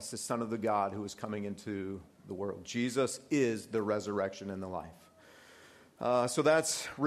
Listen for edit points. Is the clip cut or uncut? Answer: uncut